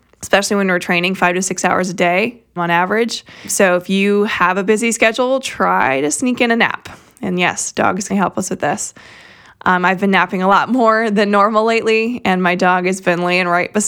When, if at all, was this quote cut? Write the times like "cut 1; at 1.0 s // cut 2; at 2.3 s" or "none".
cut 1; at 2.6 s // cut 2; at 8.1 s